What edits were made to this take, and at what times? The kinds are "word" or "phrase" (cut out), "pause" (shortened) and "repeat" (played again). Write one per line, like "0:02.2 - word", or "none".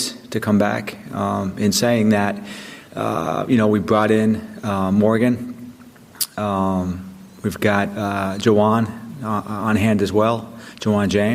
0:02.9 - pause